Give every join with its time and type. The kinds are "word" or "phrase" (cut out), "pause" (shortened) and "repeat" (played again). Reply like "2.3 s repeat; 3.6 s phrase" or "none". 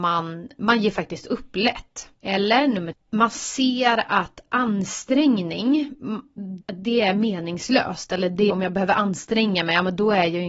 2.1 s pause; 2.9 s word; 6.6 s phrase; 8.5 s word